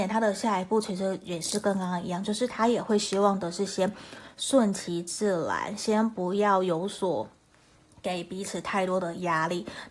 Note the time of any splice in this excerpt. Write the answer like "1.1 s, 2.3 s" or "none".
none